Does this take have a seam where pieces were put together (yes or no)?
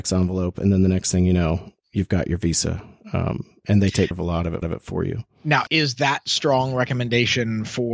yes